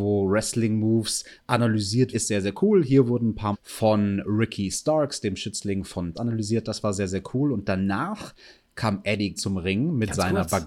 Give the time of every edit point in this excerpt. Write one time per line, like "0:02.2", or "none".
0:02.1
0:03.5
0:06.1
0:09.4